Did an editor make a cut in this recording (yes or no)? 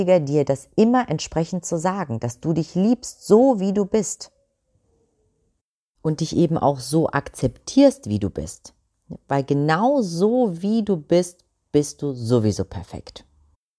no